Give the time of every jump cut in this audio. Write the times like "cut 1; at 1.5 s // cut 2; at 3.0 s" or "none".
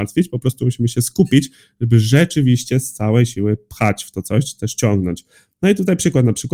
none